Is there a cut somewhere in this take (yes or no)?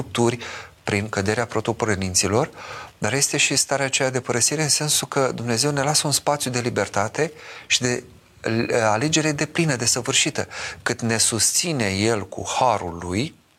no